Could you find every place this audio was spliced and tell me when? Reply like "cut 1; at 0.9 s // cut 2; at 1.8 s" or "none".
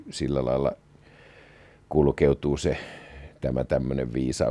none